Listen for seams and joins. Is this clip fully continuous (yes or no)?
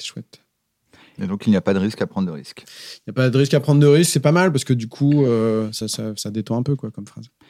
yes